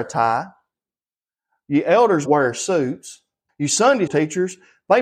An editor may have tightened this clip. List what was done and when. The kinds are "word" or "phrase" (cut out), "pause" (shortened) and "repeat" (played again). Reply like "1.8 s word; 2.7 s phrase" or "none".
2.3 s word; 3.5 s pause; 4.1 s word